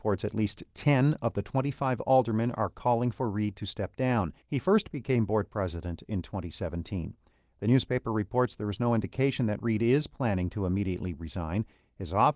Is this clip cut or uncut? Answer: cut